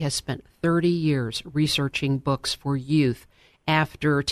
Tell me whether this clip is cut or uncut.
uncut